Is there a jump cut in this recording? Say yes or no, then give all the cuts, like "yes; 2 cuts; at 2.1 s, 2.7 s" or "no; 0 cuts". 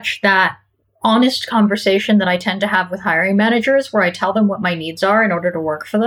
no; 0 cuts